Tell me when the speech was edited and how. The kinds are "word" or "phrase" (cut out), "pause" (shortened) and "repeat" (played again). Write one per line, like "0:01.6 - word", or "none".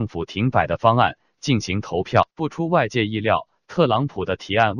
0:02.3 - pause